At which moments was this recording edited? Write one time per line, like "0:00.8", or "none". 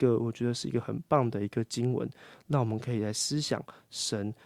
none